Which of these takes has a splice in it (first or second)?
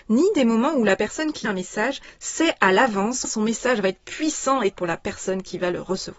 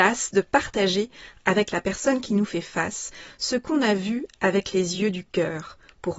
first